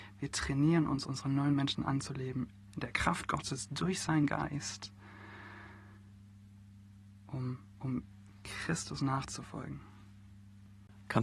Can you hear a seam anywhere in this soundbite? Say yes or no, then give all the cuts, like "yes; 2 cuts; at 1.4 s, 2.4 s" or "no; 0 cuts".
yes; 1 cut; at 2.7 s